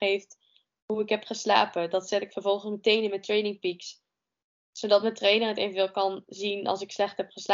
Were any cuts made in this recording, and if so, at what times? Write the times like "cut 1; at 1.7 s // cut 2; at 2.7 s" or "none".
none